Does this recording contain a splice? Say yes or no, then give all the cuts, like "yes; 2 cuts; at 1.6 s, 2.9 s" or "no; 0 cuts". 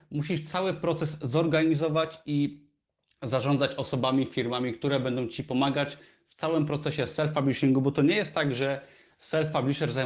no; 0 cuts